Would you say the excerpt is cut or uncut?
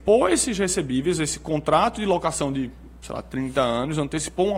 uncut